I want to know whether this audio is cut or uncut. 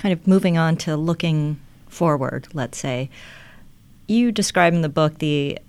uncut